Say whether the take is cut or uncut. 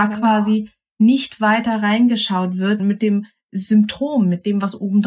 cut